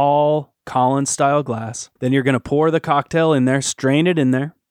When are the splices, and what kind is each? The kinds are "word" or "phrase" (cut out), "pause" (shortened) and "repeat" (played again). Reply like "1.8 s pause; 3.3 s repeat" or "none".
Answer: 2.0 s pause